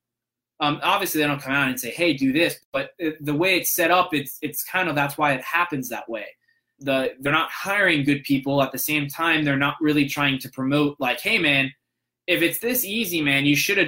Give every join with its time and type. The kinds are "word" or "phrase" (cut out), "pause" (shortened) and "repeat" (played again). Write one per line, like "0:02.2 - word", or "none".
0:06.8 - word